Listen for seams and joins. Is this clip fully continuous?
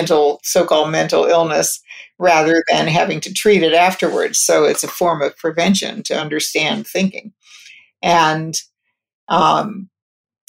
yes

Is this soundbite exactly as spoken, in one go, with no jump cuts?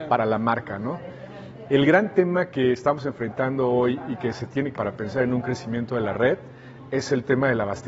no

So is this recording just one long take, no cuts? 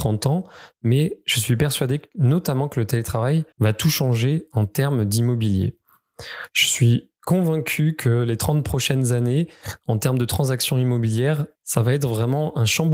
no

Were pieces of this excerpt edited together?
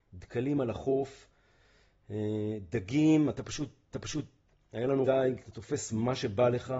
yes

